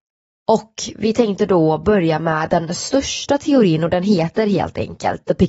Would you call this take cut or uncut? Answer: uncut